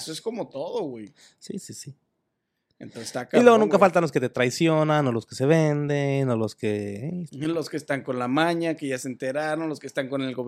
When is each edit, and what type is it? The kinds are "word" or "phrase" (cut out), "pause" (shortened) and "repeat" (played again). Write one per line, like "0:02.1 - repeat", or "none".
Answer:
none